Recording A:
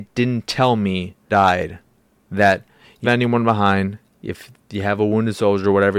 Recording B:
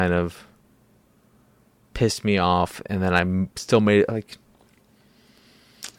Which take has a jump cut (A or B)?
A